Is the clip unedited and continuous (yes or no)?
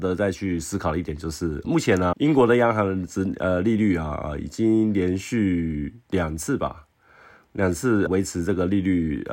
no